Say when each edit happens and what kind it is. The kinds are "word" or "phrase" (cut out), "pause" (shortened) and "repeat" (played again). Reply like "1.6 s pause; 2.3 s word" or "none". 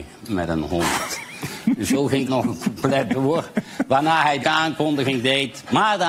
2.3 s word; 4.4 s word